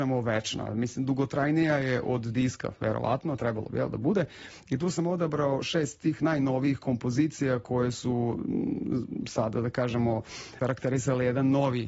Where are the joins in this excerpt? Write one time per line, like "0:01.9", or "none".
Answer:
0:10.6

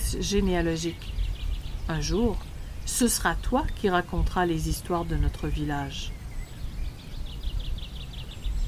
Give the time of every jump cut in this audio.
none

